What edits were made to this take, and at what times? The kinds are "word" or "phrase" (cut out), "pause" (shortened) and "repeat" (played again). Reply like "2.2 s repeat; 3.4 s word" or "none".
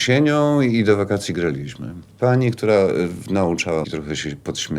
3.8 s word